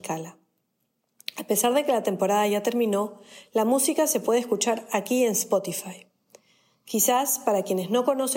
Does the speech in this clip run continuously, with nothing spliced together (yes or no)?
yes